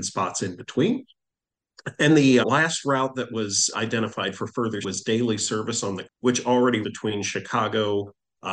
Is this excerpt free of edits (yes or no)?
no